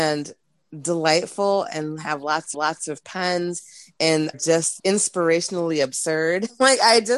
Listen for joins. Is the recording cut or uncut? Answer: cut